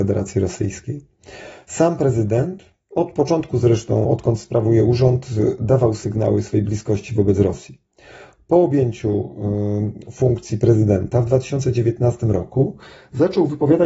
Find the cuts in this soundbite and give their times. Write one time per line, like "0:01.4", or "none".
none